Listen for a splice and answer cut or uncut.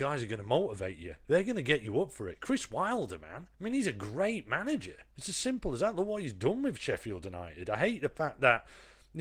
cut